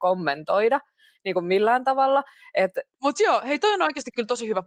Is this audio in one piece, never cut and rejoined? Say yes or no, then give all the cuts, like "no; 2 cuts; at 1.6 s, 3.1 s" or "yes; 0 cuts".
yes; 0 cuts